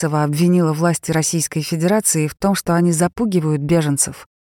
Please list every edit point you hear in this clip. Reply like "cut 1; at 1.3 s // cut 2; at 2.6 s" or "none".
none